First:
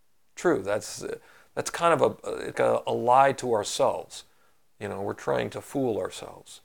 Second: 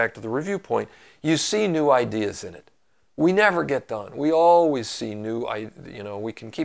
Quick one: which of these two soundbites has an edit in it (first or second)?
first